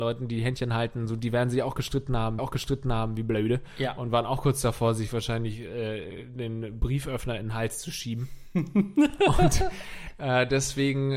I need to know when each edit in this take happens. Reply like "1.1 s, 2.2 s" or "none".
2.4 s